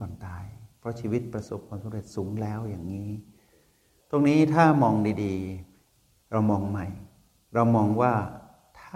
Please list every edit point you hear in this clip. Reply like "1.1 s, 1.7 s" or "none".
none